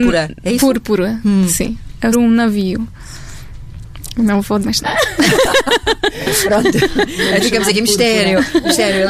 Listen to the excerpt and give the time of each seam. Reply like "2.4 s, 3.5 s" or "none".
2.1 s, 4.6 s, 7.4 s